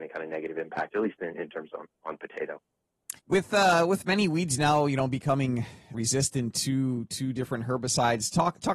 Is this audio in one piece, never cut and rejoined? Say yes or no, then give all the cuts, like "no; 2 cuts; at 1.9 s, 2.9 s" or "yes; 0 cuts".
no; 2 cuts; at 3.2 s, 5.9 s